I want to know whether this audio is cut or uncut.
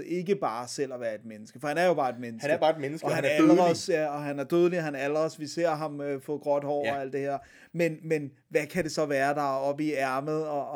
uncut